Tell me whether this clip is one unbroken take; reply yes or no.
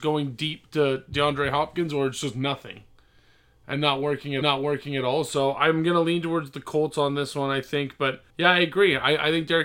no